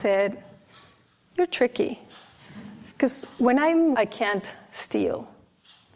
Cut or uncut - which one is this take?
cut